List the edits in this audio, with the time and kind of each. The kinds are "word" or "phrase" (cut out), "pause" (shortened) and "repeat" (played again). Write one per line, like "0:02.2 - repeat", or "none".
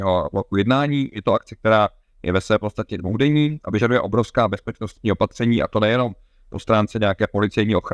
none